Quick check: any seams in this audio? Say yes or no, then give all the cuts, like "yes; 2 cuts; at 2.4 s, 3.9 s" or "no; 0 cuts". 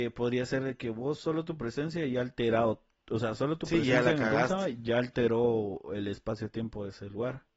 no; 0 cuts